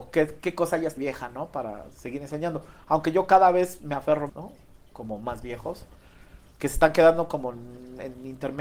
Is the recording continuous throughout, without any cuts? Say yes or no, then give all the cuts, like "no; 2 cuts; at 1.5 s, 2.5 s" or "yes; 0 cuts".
no; 2 cuts; at 1.0 s, 4.3 s